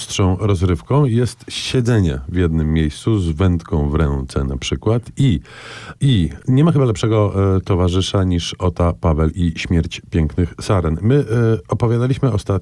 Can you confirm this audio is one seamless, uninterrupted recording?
yes; 0 cuts

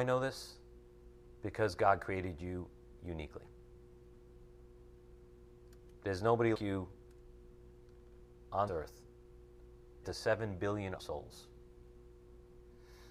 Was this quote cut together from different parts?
yes; 4 cuts; at 6.5 s, 8.7 s, 10.0 s, 11.0 s

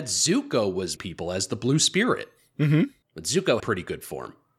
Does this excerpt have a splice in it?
yes; 3 cuts; at 1.0 s, 3.0 s, 3.6 s

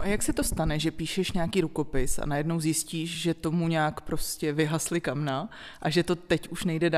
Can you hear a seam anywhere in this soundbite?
no; 0 cuts

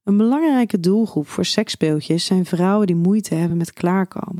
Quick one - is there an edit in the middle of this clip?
no; 0 cuts

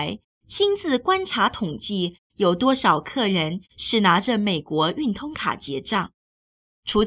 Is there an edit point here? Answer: no; 0 cuts

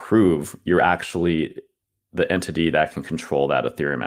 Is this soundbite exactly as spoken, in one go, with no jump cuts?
yes; 0 cuts

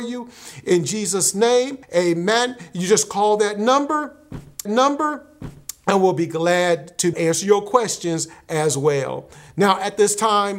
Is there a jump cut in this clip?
yes; 3 cuts; at 1.8 s, 4.7 s, 7.1 s

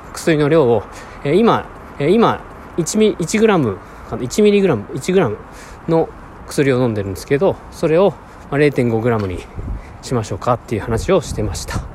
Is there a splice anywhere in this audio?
yes; 1 cut; at 2.0 s

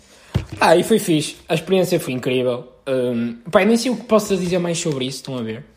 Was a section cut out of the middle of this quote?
yes; 1 cut; at 2.1 s

